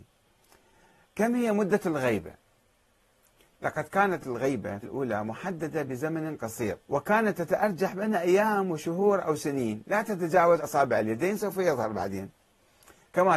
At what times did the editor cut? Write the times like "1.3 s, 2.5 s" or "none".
4.2 s, 4.8 s, 6.8 s, 10.6 s